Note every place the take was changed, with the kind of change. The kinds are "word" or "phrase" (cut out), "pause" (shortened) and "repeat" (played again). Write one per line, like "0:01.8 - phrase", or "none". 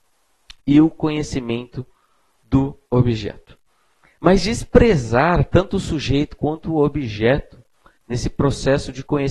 none